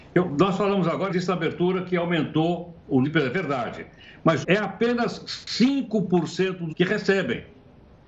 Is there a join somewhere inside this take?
yes; 4 cuts; at 1.1 s, 3.0 s, 4.4 s, 6.7 s

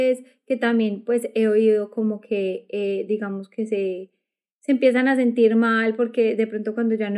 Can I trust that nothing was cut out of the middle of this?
yes; 0 cuts

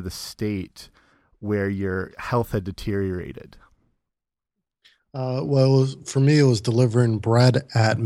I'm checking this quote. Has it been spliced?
no; 0 cuts

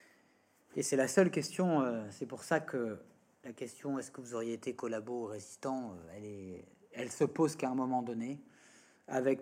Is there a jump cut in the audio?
no; 0 cuts

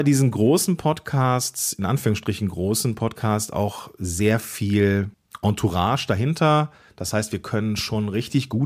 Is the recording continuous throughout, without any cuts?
yes; 0 cuts

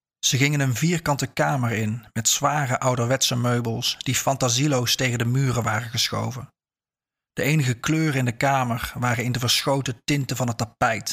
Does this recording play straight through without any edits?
yes; 0 cuts

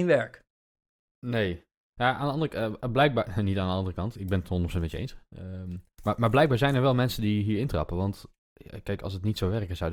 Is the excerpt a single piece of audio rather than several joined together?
no; 1 cut; at 4.1 s

